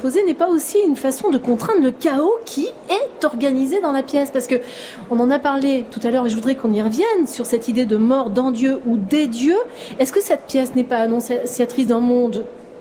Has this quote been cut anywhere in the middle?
no; 0 cuts

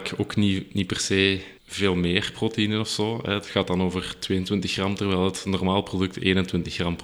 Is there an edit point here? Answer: yes; 1 cut; at 1.6 s

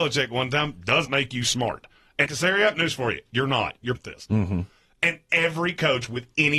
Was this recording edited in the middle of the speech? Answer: yes; 4 cuts; at 1.1 s, 2.3 s, 2.7 s, 4.0 s

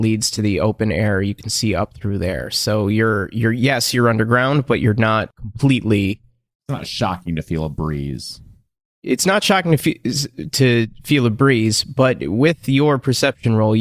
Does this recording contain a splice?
no; 0 cuts

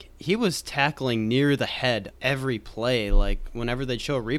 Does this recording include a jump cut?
yes; 1 cut; at 2.1 s

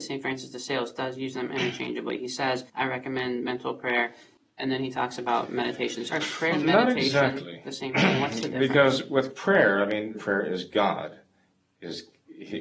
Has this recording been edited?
yes; 4 cuts; at 2.7 s, 6.1 s, 6.5 s, 10.1 s

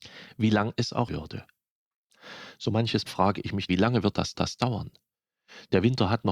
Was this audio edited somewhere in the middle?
yes; 4 cuts; at 1.1 s, 3.1 s, 3.7 s, 4.3 s

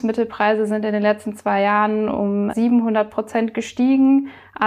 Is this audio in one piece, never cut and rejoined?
no; 1 cut; at 2.5 s

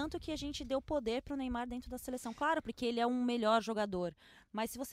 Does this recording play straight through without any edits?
yes; 0 cuts

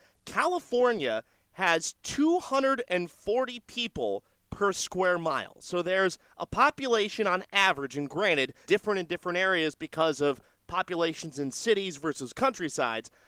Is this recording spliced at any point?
yes; 1 cut; at 8.6 s

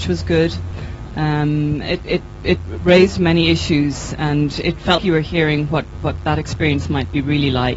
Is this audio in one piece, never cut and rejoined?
no; 2 cuts; at 2.0 s, 5.0 s

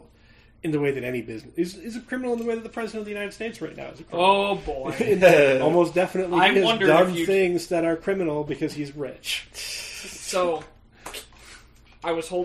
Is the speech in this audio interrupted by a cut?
no; 0 cuts

